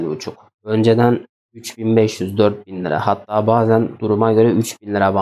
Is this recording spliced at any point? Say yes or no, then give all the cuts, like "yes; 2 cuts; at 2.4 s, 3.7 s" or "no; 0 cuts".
no; 0 cuts